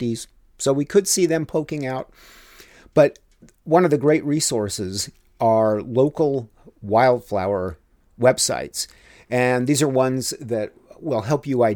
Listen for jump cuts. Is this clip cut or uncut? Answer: cut